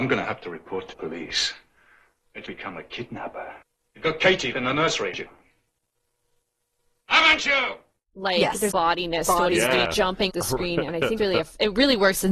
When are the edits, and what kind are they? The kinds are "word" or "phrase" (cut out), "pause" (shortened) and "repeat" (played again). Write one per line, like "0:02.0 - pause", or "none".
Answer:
0:00.9 - word
0:02.4 - word
0:04.5 - word
0:05.1 - word
0:08.7 - word
0:09.8 - word
0:10.3 - word
0:11.2 - word